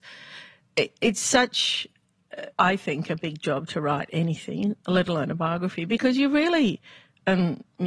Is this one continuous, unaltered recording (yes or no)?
no